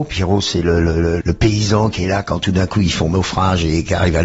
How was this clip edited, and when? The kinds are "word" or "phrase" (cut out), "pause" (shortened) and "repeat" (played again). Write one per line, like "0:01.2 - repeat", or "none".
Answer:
0:01.2 - word